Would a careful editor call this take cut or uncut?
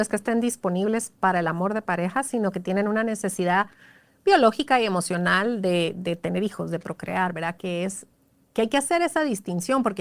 uncut